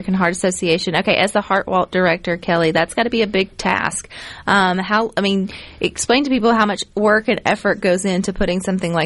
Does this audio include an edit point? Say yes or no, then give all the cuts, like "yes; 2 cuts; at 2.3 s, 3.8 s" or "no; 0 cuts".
no; 0 cuts